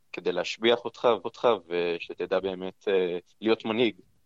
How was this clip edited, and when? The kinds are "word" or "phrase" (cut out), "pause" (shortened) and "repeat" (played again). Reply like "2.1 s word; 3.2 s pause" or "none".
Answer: 1.2 s repeat; 3.3 s pause